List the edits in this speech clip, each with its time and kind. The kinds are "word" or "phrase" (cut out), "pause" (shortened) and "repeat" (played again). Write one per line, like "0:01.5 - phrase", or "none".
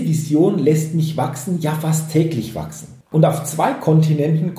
0:03.0 - pause